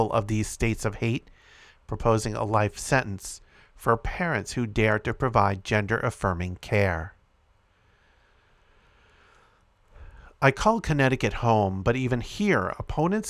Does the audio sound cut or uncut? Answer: uncut